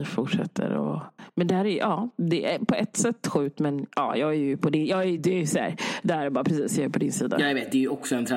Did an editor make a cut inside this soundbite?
no; 0 cuts

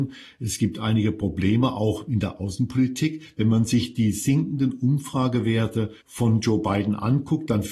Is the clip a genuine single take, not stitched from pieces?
no; 1 cut; at 6.0 s

